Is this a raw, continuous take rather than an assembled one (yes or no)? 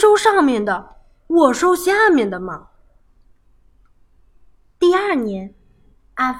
yes